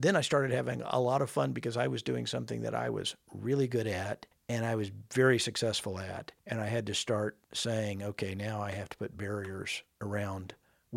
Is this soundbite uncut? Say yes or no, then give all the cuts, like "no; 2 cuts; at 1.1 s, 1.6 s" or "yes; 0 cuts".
no; 3 cuts; at 4.3 s, 6.4 s, 7.4 s